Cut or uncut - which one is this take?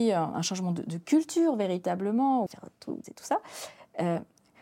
cut